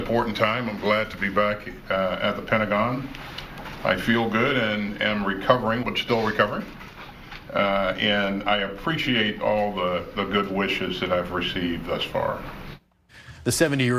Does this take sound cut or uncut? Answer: cut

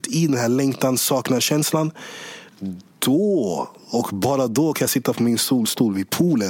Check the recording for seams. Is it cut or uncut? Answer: uncut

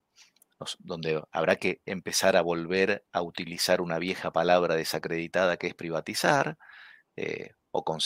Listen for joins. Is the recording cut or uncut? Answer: uncut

